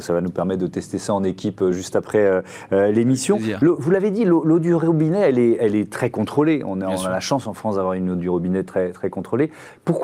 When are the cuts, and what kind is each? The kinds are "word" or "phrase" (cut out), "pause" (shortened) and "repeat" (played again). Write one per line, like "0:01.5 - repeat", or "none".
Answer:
none